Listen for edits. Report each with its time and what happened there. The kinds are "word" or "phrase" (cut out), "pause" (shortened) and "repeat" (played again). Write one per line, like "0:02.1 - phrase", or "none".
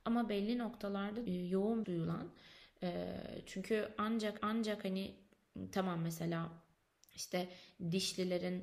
0:01.3 - phrase
0:01.8 - phrase
0:04.4 - repeat
0:06.7 - pause